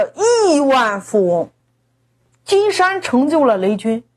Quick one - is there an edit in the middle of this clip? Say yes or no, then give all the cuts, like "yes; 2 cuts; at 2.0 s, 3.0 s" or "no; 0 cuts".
no; 0 cuts